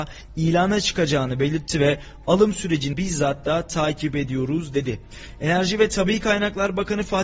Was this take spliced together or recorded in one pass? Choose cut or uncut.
cut